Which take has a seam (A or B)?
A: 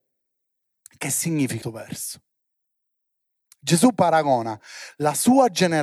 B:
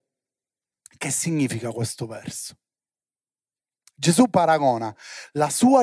A